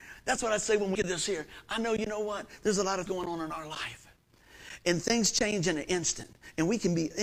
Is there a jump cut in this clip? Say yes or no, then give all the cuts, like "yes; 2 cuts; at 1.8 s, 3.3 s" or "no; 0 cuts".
yes; 2 cuts; at 0.9 s, 3.1 s